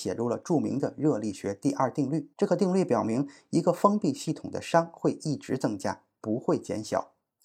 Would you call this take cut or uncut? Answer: cut